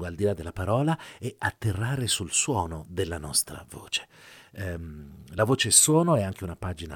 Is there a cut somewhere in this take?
no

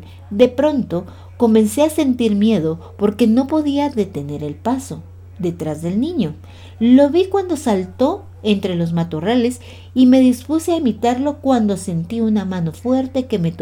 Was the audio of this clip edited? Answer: no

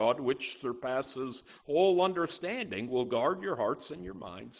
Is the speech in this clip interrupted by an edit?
no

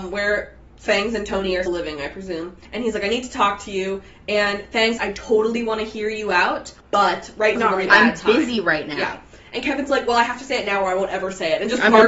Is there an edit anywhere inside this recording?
yes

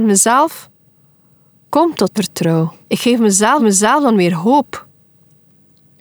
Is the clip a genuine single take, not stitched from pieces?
no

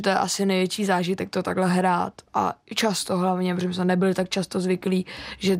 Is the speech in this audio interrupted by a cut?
no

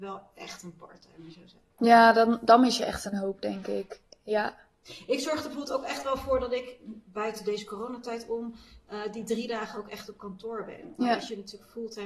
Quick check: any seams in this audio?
yes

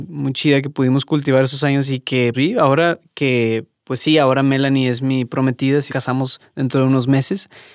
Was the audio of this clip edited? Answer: yes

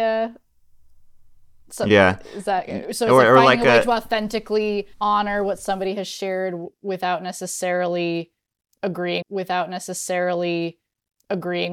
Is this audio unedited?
no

